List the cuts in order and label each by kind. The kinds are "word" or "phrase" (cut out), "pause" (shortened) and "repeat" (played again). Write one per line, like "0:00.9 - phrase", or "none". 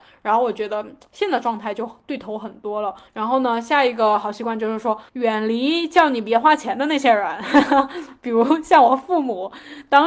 0:03.1 - pause
0:05.1 - pause